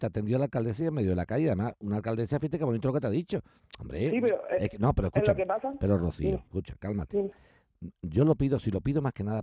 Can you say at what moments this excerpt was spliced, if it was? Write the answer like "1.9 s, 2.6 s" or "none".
none